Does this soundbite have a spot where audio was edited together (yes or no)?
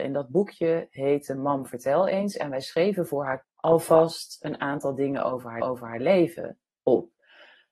yes